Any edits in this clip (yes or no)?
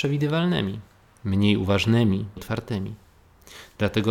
yes